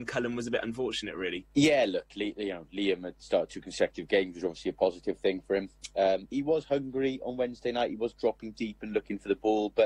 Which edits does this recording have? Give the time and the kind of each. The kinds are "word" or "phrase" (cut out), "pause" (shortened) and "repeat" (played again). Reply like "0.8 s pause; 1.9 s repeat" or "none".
1.5 s pause; 6.3 s word